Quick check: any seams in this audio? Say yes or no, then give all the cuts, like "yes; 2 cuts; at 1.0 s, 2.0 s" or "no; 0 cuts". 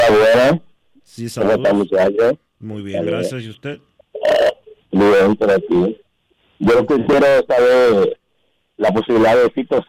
no; 0 cuts